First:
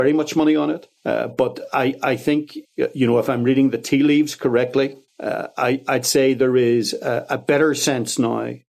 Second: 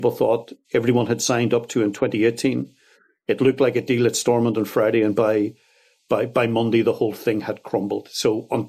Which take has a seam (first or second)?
first